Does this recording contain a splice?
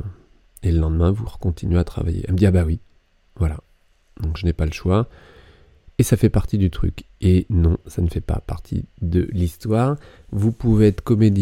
no; 0 cuts

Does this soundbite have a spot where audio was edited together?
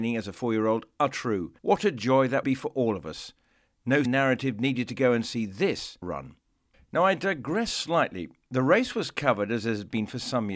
yes; 5 cuts; at 1.6 s, 2.4 s, 4.1 s, 6.0 s, 6.7 s

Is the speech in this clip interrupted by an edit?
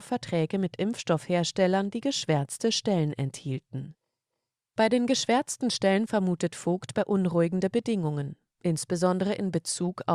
no; 0 cuts

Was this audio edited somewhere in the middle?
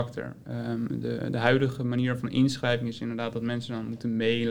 no; 0 cuts

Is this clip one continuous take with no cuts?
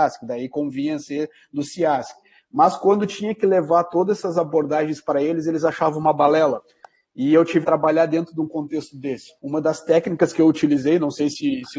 no; 2 cuts; at 7.6 s, 9.4 s

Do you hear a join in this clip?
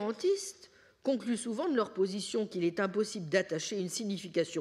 no; 0 cuts

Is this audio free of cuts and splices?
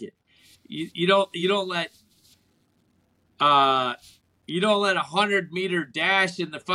yes; 0 cuts

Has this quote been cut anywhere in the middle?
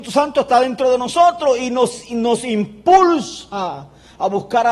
no; 0 cuts

